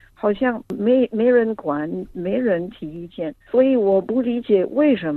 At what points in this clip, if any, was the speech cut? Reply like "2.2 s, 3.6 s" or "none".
3.4 s